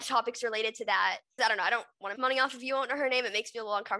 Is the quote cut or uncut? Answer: cut